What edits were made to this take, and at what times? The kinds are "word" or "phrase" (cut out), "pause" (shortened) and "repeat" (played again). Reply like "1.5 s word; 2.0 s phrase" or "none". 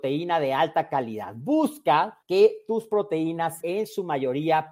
2.2 s pause; 3.6 s word